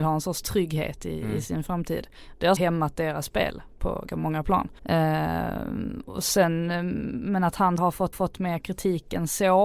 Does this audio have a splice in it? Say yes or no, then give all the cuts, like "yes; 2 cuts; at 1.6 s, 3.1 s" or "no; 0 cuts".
yes; 5 cuts; at 2.6 s, 4.1 s, 4.8 s, 7.8 s, 8.1 s